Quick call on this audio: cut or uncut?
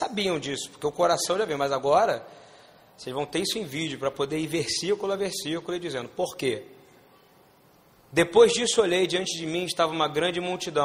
uncut